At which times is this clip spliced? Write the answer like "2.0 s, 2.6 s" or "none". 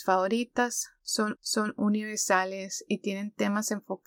1.4 s